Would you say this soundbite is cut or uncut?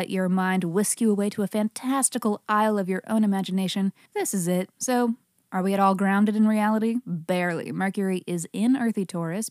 cut